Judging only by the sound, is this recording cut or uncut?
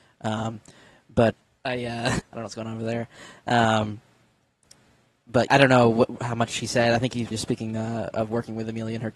cut